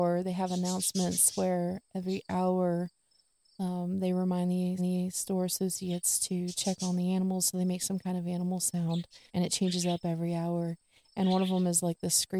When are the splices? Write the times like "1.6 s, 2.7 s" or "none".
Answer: 4.8 s, 9.3 s